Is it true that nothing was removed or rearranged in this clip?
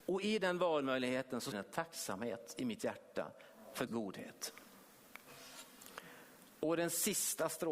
no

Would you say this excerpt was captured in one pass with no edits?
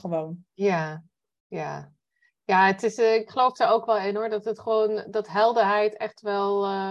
yes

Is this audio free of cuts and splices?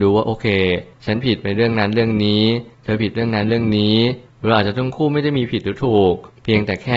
yes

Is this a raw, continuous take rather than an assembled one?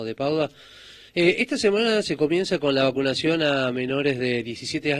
no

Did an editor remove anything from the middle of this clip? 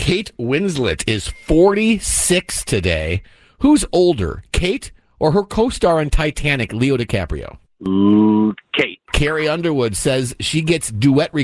no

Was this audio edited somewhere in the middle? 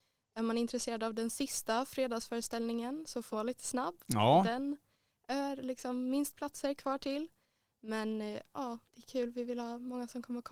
yes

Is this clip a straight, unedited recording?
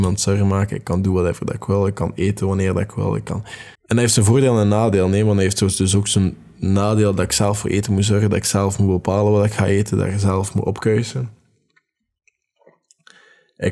no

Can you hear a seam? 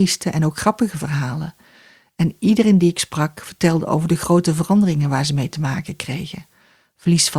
no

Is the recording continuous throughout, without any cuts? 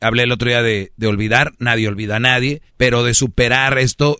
no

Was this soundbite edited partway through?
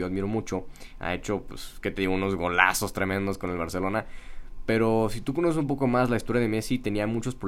no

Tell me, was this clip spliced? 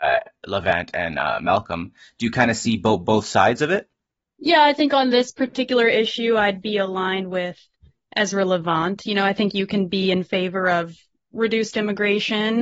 no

